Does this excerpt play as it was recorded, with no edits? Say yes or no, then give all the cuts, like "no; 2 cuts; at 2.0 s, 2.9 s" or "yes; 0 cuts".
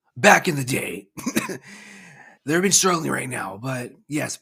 no; 1 cut; at 2.4 s